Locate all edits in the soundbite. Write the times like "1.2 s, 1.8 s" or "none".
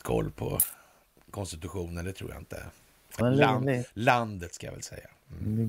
3.2 s